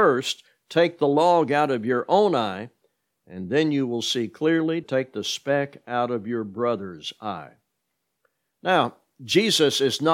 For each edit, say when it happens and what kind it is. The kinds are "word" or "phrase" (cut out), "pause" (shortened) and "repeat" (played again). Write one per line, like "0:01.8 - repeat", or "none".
0:04.8 - word